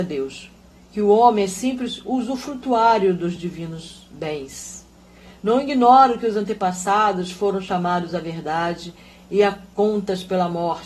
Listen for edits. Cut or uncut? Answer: uncut